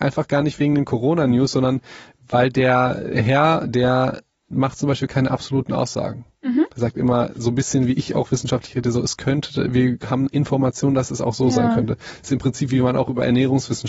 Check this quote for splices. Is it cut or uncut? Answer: uncut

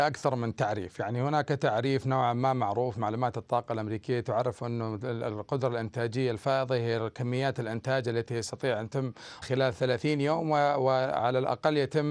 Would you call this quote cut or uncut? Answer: cut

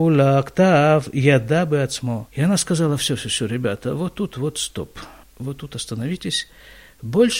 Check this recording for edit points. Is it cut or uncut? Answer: cut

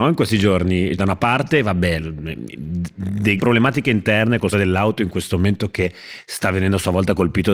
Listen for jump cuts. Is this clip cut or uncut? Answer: cut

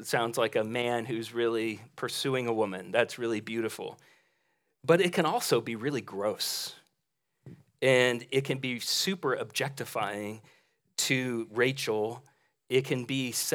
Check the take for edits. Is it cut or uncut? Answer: uncut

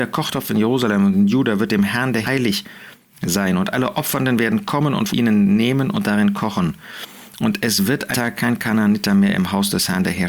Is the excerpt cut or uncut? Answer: cut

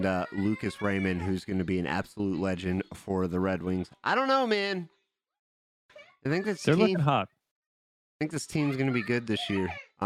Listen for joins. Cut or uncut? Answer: uncut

